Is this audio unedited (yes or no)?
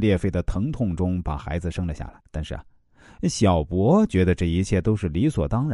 no